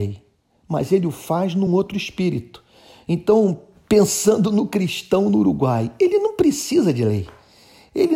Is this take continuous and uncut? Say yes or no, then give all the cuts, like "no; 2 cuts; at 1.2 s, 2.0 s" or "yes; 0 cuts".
yes; 0 cuts